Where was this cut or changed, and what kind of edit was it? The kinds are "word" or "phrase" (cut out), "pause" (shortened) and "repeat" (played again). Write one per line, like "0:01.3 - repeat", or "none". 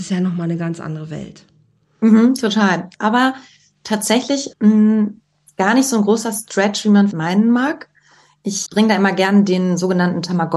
0:04.5 - word
0:07.1 - word
0:08.7 - word